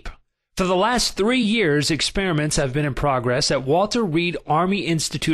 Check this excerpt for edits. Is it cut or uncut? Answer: uncut